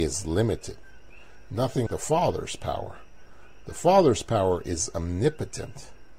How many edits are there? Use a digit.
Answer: 1